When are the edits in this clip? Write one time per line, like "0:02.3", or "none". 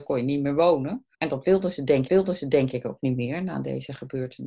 0:01.1
0:02.1